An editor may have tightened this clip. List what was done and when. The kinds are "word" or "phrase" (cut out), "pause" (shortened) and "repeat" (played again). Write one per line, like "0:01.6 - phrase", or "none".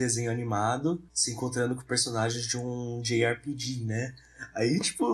0:01.1 - pause